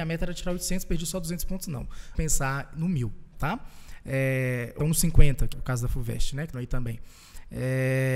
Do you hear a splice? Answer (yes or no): yes